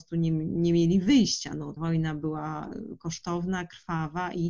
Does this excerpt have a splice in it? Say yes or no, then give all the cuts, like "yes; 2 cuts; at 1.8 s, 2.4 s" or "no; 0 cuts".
yes; 1 cut; at 1.8 s